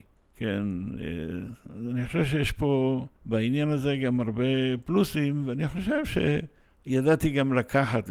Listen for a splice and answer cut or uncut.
cut